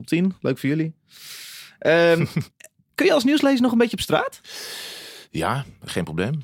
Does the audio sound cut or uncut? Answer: cut